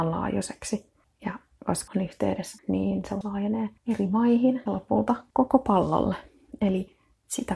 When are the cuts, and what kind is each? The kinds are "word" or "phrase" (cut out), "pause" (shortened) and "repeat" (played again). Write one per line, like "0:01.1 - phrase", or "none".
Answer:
0:01.0 - pause
0:01.9 - word
0:02.6 - word
0:03.2 - word
0:03.8 - pause
0:04.7 - word
0:05.3 - pause